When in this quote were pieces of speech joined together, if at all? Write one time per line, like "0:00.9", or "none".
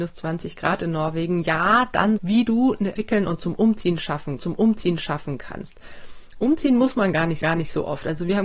0:02.2
0:03.0
0:04.4
0:07.4